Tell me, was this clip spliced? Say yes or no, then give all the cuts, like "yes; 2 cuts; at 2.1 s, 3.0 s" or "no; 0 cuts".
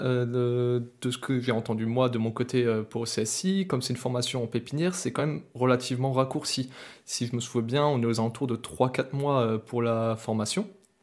no; 0 cuts